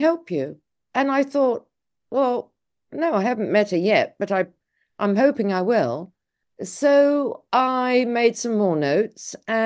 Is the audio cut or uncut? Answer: uncut